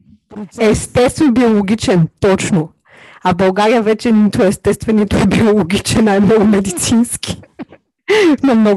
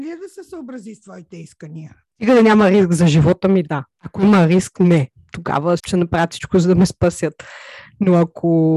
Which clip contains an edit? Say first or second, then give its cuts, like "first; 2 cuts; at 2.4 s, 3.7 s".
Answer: second; 1 cut; at 5.8 s